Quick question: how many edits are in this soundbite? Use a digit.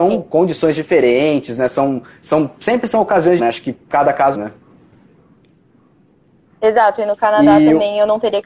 2